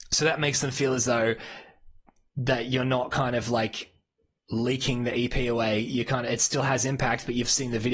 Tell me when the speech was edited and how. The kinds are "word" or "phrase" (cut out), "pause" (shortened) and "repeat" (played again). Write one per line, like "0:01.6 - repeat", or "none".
none